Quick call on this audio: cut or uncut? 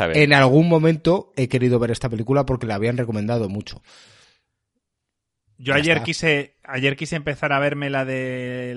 uncut